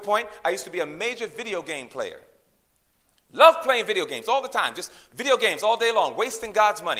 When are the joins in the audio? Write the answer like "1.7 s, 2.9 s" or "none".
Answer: none